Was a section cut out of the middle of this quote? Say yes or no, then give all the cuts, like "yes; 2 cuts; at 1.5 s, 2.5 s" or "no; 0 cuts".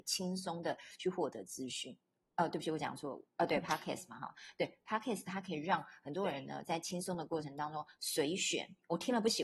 no; 0 cuts